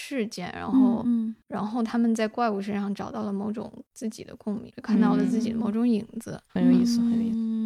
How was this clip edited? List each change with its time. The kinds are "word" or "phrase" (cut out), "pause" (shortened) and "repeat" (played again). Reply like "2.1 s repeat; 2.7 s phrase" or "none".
4.7 s word; 6.5 s pause

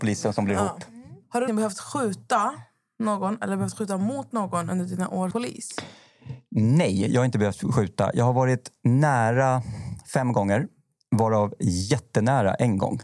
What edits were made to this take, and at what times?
1.5 s word; 5.3 s word

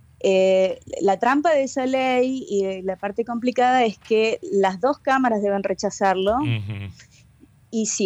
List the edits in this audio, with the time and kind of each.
none

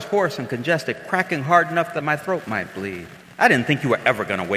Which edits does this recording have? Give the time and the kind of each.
2.0 s phrase; 3.2 s pause

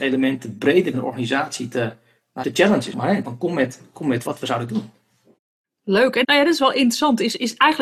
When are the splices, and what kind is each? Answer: 0.9 s word; 2.4 s word; 2.9 s word; 3.2 s word; 4.3 s word; 4.7 s word; 6.2 s word

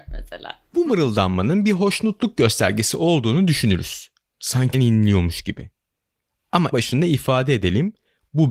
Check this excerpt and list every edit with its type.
4.7 s word; 6.7 s word

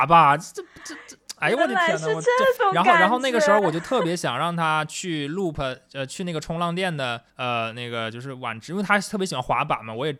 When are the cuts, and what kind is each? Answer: 7.3 s pause

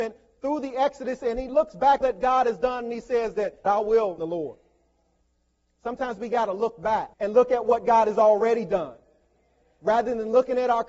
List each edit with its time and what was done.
2.0 s phrase; 3.7 s word; 4.2 s phrase; 5.2 s pause; 7.1 s pause

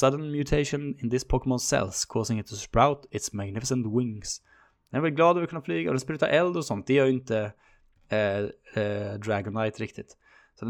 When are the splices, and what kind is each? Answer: none

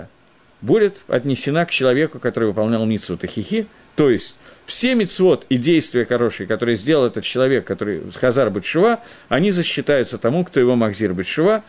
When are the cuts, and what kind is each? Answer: none

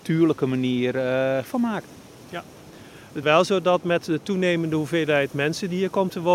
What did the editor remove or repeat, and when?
1.4 s word; 3.2 s word

